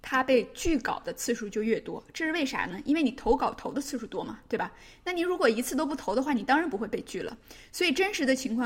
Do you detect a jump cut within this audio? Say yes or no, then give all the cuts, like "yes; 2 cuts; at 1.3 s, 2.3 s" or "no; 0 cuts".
no; 0 cuts